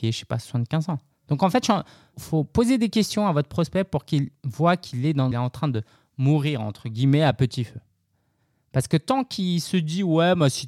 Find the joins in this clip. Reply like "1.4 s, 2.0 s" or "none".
1.1 s, 2.1 s, 5.3 s